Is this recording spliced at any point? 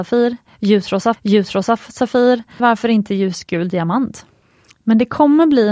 yes; 3 cuts; at 1.1 s, 2.6 s, 4.4 s

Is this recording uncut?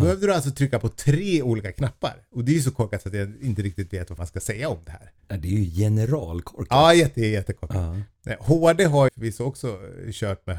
no; 3 cuts; at 4.2 s, 5.2 s, 9.1 s

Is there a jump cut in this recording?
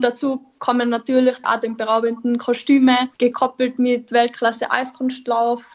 yes; 2 cuts; at 1.4 s, 3.1 s

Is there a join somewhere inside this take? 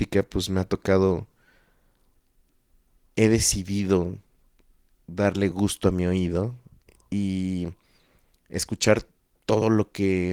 no; 0 cuts

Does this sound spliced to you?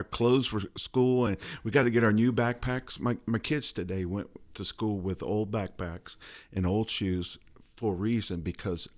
no; 0 cuts

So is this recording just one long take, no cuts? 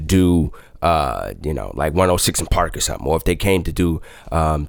yes; 0 cuts

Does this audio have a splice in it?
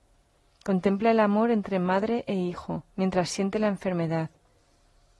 yes; 1 cut; at 2.9 s

